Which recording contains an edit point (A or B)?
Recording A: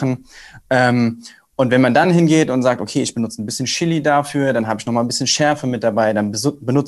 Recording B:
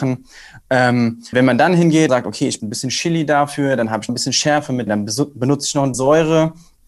B